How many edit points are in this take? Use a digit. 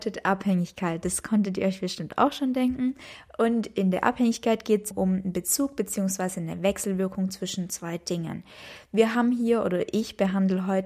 1